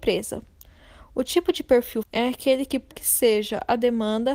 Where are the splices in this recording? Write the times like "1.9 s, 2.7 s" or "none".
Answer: 2.0 s, 2.9 s